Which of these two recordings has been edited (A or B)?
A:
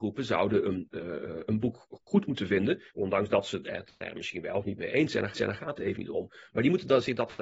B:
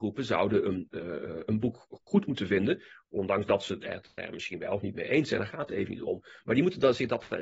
A